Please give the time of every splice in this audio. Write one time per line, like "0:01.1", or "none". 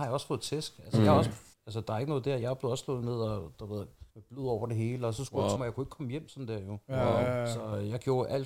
0:01.5
0:04.1
0:05.6